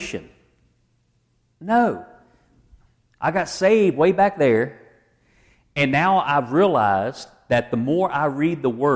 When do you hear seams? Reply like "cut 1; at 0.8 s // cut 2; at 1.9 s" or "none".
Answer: none

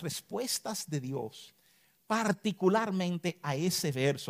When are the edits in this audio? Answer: none

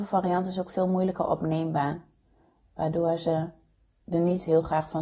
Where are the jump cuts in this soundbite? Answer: none

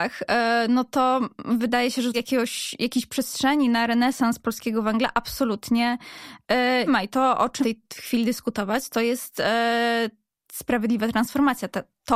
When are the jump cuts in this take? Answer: cut 1; at 2.1 s // cut 2; at 6.9 s // cut 3; at 7.6 s

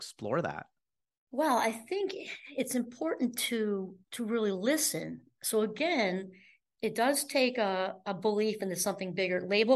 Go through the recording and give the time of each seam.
cut 1; at 4.0 s

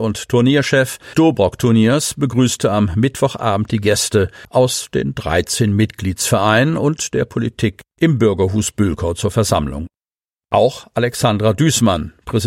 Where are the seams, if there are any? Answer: cut 1; at 1.1 s

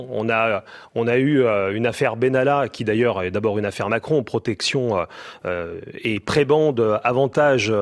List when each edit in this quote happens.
none

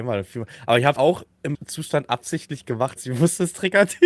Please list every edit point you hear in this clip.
cut 1; at 1.0 s // cut 2; at 1.5 s // cut 3; at 3.0 s

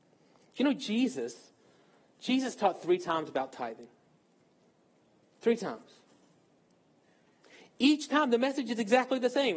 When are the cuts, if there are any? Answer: none

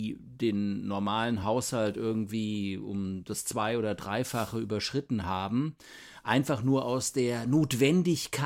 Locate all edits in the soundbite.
none

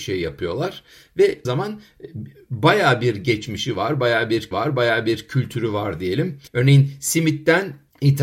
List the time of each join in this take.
cut 1; at 1.5 s // cut 2; at 4.5 s // cut 3; at 6.5 s

